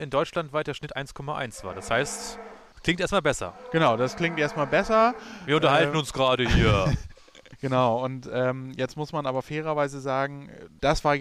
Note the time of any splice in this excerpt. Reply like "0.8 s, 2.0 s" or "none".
none